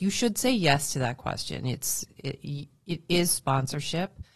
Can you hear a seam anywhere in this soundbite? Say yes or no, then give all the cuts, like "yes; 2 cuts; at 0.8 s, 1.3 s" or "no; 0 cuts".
no; 0 cuts